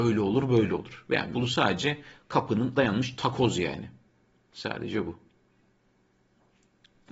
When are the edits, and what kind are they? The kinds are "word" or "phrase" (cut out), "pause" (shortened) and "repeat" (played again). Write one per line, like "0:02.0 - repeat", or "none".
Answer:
0:01.3 - word
0:02.7 - word